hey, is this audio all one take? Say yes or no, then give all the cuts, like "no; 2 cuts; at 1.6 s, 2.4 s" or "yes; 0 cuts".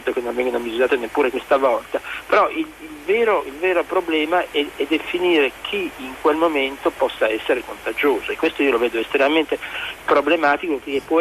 yes; 0 cuts